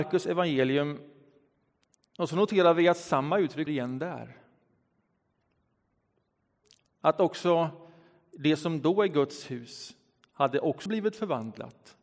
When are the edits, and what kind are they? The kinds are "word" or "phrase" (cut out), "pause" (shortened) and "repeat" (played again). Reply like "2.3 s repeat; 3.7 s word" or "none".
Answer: 3.7 s word; 10.9 s word